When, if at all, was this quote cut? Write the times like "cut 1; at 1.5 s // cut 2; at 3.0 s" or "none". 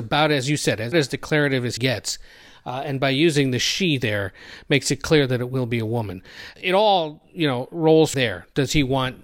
cut 1; at 0.9 s // cut 2; at 1.8 s // cut 3; at 6.5 s // cut 4; at 8.1 s